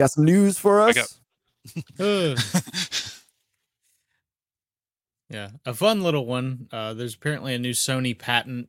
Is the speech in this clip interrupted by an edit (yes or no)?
no